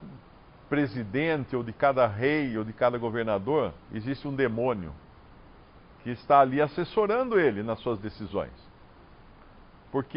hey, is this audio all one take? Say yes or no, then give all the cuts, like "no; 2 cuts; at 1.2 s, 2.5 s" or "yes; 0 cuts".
no; 1 cut; at 3.8 s